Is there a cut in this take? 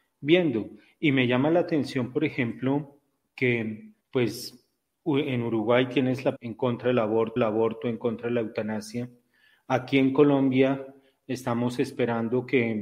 yes; 3 cuts; at 4.0 s, 6.4 s, 7.4 s

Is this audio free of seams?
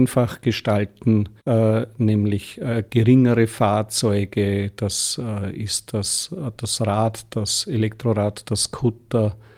no; 1 cut; at 1.4 s

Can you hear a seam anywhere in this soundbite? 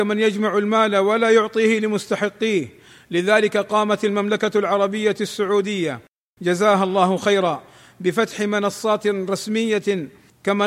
no; 0 cuts

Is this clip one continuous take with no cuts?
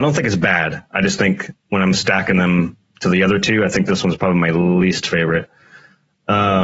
yes; 0 cuts

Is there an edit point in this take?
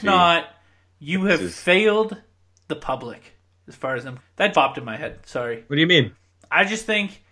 yes; 2 cuts; at 4.2 s, 4.5 s

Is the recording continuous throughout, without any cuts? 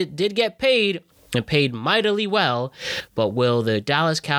yes; 0 cuts

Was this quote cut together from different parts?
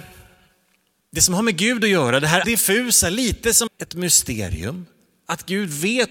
yes; 2 cuts; at 2.4 s, 3.7 s

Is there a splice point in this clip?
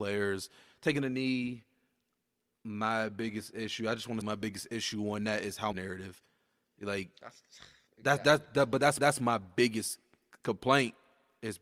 yes; 3 cuts; at 4.2 s, 5.7 s, 9.0 s

